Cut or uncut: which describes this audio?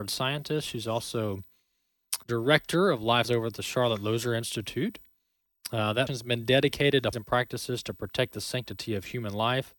cut